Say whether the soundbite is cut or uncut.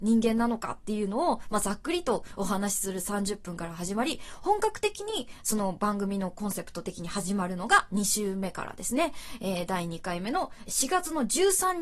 cut